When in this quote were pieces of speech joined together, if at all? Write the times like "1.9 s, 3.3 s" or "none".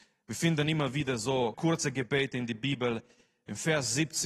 1.5 s